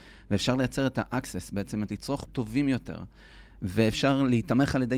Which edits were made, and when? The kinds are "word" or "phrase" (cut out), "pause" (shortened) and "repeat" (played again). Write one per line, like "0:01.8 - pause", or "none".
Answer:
0:01.9 - word
0:02.3 - word